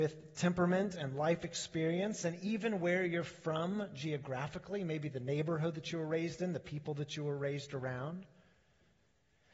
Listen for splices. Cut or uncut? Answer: uncut